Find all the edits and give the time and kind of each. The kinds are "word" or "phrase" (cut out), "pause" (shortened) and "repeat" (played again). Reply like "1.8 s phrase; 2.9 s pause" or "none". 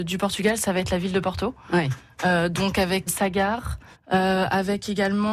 3.1 s word; 3.9 s pause